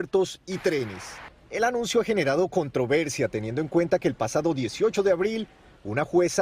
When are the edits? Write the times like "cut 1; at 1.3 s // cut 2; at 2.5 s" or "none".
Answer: none